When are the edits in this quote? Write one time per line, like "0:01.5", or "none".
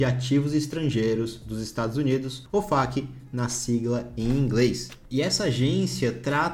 none